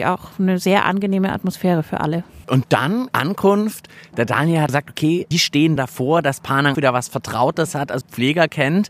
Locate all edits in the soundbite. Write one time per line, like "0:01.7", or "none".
0:02.4
0:03.1
0:04.7
0:05.3
0:05.8
0:06.7
0:08.0

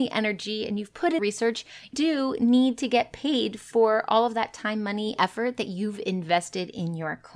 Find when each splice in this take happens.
0:01.2
0:01.9
0:05.2

